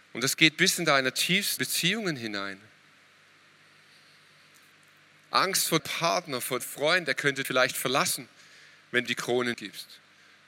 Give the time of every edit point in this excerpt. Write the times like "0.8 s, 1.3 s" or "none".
1.6 s, 5.8 s, 6.6 s, 7.4 s, 9.1 s, 9.5 s